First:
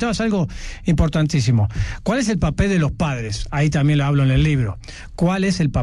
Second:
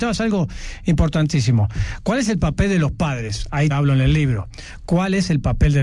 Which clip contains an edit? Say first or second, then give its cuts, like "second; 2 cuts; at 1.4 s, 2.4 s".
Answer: second; 1 cut; at 3.7 s